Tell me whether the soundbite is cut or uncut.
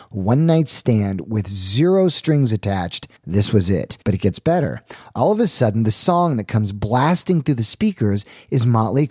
cut